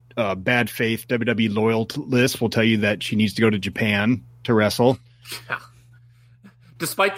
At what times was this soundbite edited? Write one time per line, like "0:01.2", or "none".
none